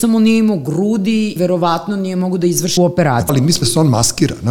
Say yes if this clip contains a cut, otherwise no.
yes